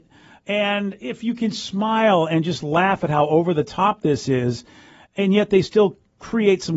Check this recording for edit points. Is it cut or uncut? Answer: uncut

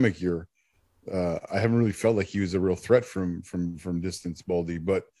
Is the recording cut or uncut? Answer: uncut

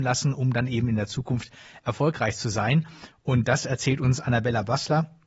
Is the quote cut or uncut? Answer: uncut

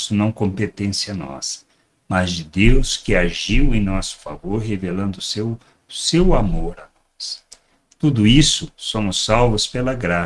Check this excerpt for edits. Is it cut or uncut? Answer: uncut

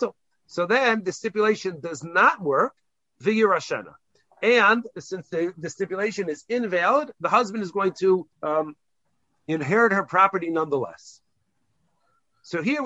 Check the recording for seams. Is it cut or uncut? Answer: cut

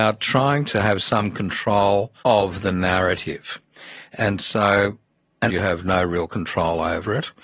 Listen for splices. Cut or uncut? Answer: cut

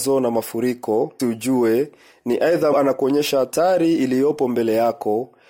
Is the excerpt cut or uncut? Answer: cut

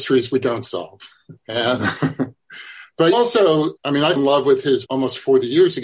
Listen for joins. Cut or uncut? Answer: cut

